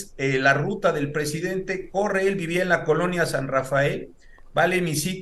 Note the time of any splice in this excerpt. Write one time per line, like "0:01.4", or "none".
none